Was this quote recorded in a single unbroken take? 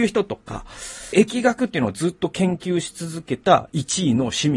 no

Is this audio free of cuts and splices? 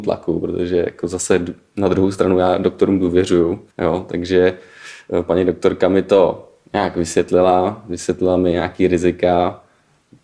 no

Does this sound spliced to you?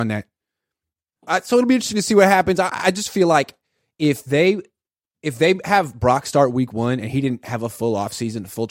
no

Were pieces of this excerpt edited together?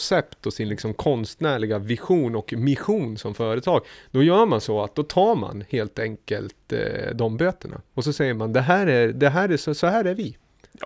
yes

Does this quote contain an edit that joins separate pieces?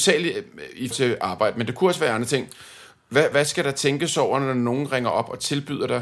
yes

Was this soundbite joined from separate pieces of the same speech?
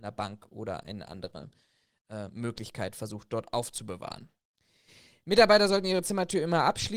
no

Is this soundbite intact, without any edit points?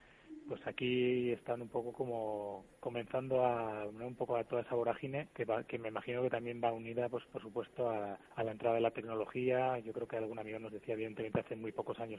no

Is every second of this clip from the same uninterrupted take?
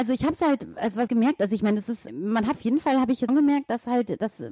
no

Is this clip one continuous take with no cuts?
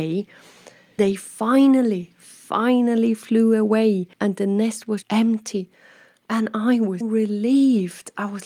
no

